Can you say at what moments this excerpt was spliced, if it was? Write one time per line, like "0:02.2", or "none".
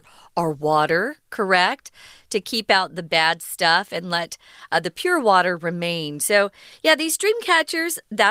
none